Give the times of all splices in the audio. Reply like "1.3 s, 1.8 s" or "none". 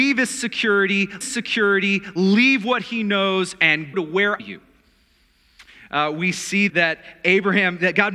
1.2 s, 3.9 s, 4.4 s, 6.7 s